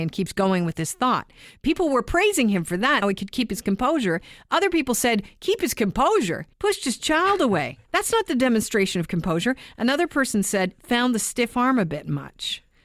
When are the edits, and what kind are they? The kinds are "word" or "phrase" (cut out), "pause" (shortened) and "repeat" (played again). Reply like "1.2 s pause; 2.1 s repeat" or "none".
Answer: 3.0 s word; 6.5 s pause; 7.8 s pause

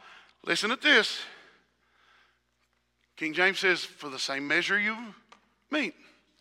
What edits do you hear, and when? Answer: none

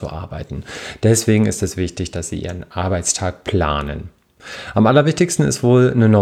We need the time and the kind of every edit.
none

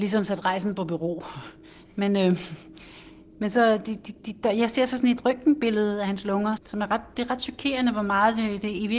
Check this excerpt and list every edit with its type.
6.6 s word

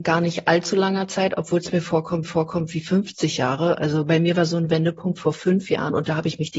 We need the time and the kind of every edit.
2.2 s repeat

